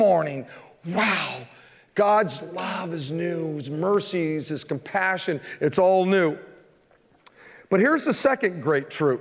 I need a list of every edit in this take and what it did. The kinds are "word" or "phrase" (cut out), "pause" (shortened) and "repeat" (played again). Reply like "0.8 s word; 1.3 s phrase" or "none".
none